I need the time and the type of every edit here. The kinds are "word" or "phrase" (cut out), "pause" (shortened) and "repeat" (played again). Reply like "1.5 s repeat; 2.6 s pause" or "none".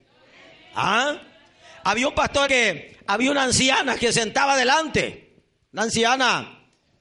2.5 s word